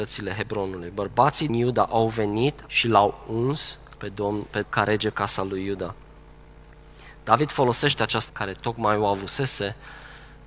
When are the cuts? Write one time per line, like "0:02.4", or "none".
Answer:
0:01.5
0:02.7
0:04.0
0:04.6
0:05.1
0:08.3